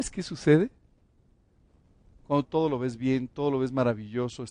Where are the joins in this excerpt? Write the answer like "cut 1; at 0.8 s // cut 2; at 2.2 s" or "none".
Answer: cut 1; at 2.4 s